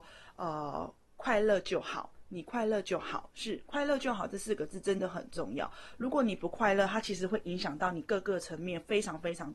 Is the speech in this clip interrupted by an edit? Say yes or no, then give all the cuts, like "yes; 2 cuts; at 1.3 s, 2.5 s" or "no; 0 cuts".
no; 0 cuts